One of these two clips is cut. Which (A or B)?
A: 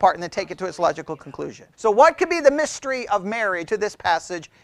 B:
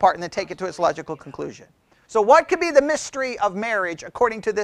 A